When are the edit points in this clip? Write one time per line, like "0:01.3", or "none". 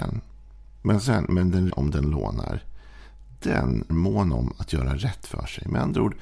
0:01.7
0:03.9